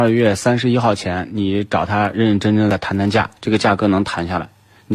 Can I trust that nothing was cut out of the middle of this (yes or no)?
no